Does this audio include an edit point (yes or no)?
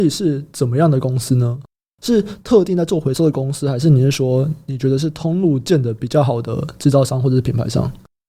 no